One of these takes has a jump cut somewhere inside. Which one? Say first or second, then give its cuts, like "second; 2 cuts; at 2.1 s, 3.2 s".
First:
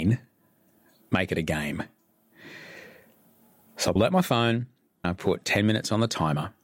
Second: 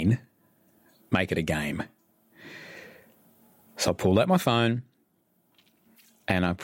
first; 2 cuts; at 4.0 s, 5.0 s